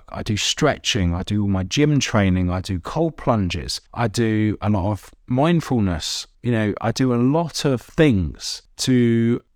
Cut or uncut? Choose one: cut